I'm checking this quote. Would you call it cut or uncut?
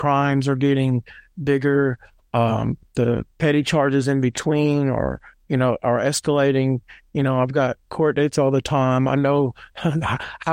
uncut